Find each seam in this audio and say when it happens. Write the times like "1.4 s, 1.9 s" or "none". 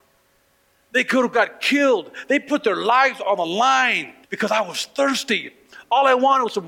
4.2 s